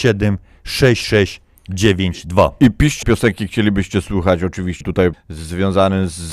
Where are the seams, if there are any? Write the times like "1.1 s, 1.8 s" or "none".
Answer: 3.0 s, 4.8 s, 5.1 s